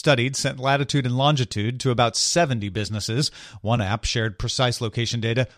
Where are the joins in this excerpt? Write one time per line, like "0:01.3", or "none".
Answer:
none

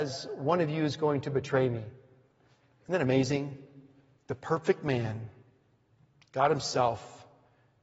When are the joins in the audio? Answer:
none

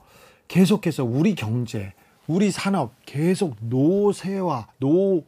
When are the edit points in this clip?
none

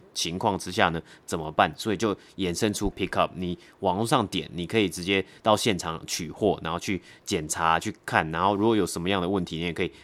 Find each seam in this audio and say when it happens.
0:02.9

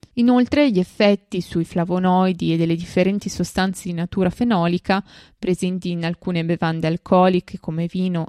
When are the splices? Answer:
none

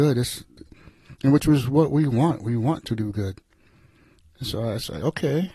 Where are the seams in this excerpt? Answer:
none

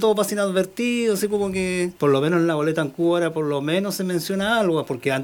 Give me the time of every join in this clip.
0:02.0

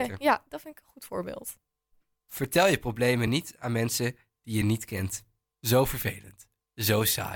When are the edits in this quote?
none

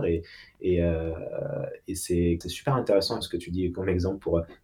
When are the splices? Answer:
0:02.4
0:03.2

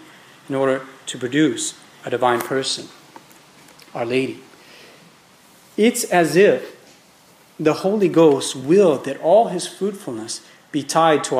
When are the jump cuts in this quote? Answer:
none

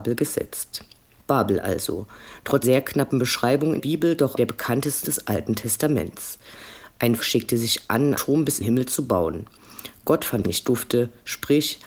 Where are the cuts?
0:01.2
0:02.6
0:03.8
0:04.4
0:05.0
0:07.2
0:08.1
0:08.6
0:10.4

